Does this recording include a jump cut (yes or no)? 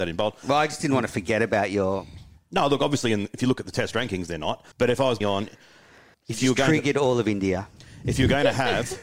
yes